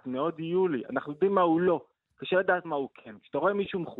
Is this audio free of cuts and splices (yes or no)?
yes